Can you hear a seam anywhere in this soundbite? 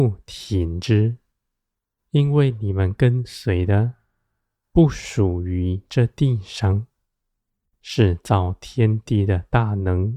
no; 0 cuts

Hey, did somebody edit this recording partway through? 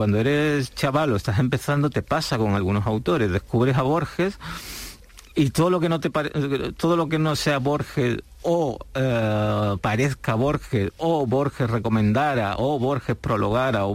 no; 0 cuts

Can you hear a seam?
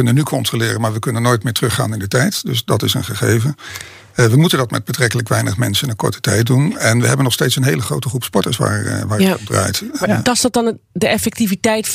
no; 0 cuts

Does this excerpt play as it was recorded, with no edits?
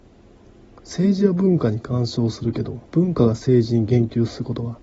no; 1 cut; at 2.9 s

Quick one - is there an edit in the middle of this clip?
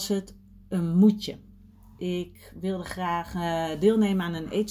no; 0 cuts

